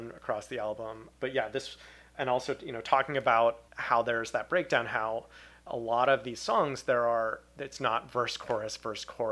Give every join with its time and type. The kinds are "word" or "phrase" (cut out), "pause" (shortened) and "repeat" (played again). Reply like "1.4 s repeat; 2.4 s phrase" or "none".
3.7 s pause